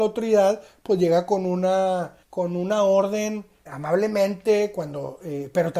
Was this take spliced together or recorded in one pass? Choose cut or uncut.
cut